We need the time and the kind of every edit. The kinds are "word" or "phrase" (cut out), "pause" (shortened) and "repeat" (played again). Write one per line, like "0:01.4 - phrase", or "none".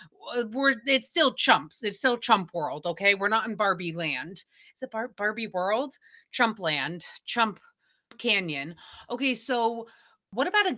none